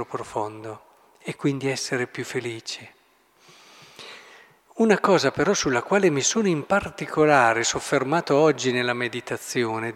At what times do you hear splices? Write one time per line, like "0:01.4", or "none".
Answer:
none